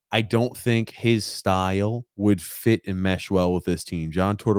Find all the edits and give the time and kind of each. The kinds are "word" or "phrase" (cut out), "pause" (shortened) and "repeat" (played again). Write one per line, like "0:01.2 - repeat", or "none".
0:02.1 - pause